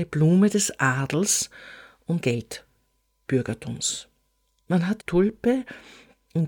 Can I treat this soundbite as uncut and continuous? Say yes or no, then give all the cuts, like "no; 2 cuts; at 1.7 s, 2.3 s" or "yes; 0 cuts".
no; 2 cuts; at 2.2 s, 5.0 s